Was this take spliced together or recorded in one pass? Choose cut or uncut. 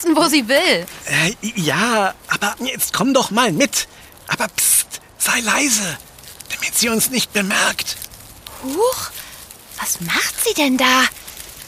cut